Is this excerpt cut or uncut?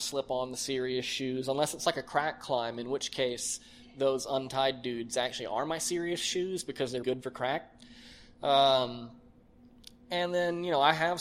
cut